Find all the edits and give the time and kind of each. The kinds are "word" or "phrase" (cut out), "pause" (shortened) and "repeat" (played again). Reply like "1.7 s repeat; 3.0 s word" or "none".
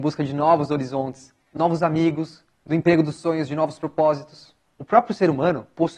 none